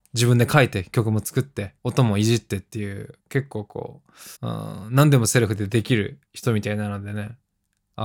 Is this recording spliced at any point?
yes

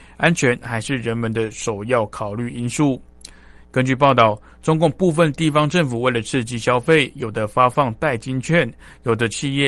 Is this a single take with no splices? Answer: yes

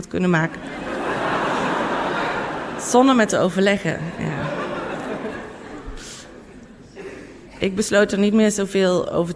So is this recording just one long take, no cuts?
no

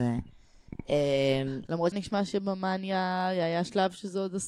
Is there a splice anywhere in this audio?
yes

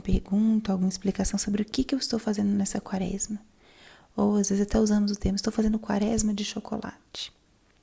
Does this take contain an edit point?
no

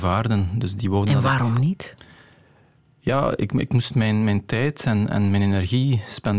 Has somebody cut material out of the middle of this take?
no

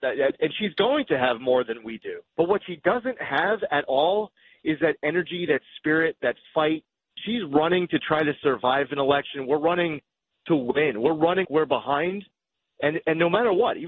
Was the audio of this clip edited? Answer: yes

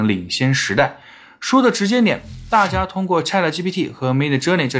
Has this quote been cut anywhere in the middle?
no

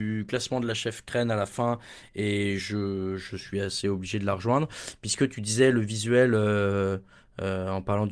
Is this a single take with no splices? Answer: yes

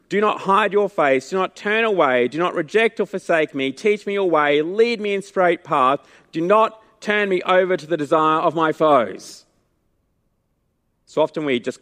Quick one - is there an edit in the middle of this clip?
no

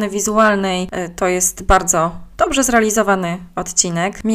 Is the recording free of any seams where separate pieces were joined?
yes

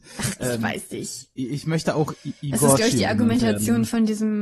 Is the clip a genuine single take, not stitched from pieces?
yes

